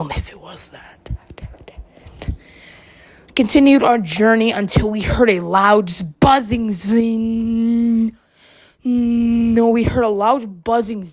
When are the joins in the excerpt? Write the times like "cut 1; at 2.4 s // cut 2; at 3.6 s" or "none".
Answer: none